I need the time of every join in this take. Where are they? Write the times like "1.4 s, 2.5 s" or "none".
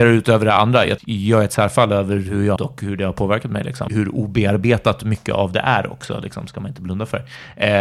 1.0 s, 2.6 s, 3.9 s